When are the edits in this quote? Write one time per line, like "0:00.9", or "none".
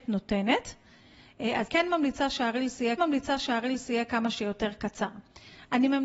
0:01.7
0:03.0

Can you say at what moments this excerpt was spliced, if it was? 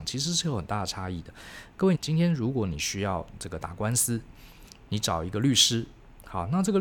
0:01.9

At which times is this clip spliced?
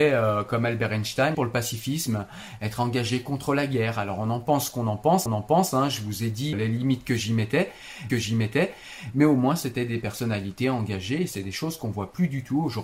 0:01.3
0:05.3
0:06.5
0:08.1

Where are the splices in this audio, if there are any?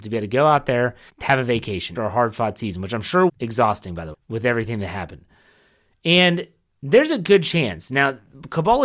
0:01.1
0:01.9
0:03.3
0:04.1

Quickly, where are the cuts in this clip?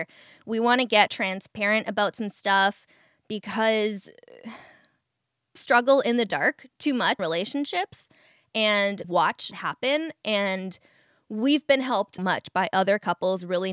0:01.1
0:05.6
0:07.2
0:09.0
0:09.5
0:12.2

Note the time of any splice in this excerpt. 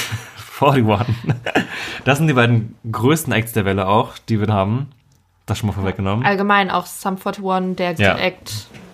0:04.5
0:08.0

